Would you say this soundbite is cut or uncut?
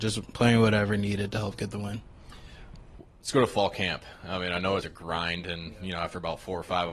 cut